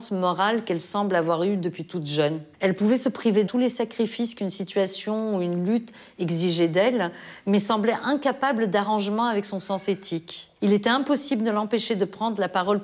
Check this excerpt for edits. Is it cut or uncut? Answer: cut